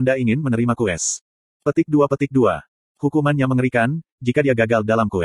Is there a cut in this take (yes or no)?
no